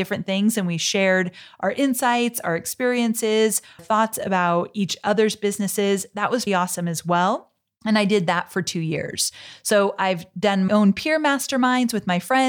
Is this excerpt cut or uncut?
cut